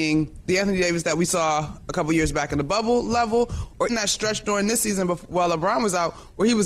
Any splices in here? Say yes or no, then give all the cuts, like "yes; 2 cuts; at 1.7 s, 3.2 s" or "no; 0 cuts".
yes; 1 cut; at 3.9 s